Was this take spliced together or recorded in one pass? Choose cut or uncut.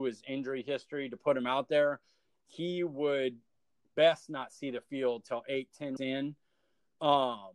cut